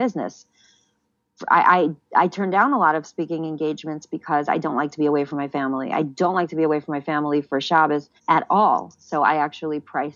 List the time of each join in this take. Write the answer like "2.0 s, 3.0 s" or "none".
8.2 s